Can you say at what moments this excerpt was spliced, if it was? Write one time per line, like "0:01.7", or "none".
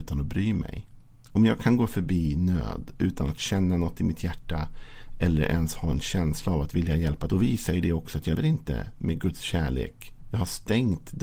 0:07.3
0:08.3